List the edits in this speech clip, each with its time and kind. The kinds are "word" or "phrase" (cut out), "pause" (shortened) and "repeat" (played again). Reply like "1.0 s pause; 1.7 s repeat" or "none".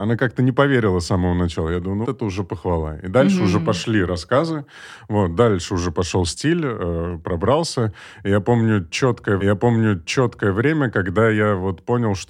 2.0 s word; 9.4 s repeat